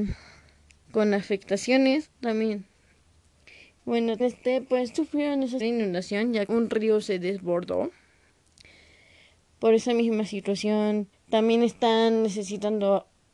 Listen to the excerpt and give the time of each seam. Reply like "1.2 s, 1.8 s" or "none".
2.1 s, 4.2 s, 4.9 s, 5.6 s, 6.5 s, 11.1 s

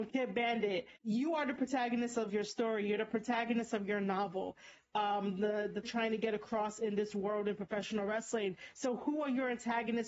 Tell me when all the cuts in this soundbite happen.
1.0 s, 2.3 s, 5.8 s

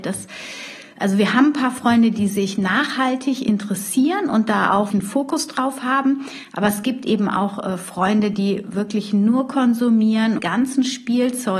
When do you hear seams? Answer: 4.9 s, 10.4 s

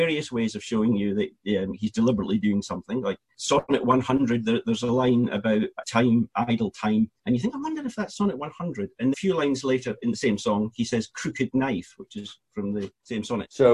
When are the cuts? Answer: 5.8 s, 7.2 s, 9.1 s

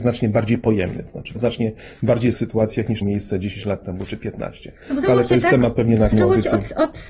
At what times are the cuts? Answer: 1.3 s, 2.3 s, 3.0 s, 5.0 s, 6.1 s

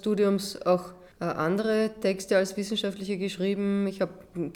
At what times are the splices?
1.1 s

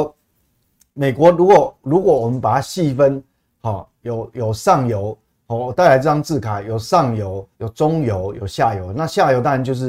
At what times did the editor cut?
7.5 s

